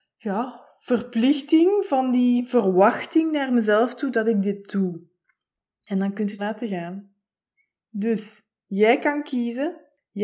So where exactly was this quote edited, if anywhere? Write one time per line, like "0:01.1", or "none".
0:06.4